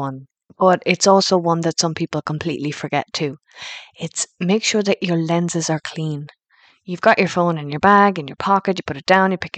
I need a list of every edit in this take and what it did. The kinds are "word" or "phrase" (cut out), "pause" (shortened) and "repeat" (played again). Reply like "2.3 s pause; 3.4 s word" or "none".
none